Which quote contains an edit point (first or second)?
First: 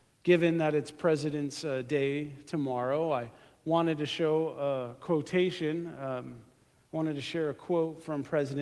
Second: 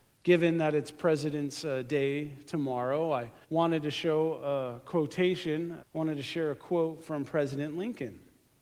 second